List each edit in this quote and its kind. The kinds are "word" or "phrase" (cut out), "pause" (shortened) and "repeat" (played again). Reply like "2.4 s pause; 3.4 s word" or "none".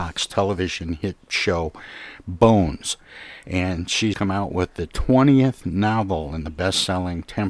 1.2 s pause; 4.1 s word